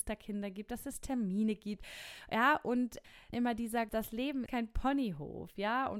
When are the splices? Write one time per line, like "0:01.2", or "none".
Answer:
0:03.3
0:03.9
0:04.5